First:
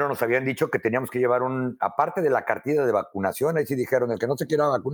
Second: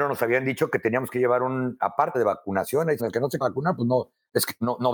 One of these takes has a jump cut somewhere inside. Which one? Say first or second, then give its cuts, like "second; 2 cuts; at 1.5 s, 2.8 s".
second; 3 cuts; at 2.1 s, 3.0 s, 3.4 s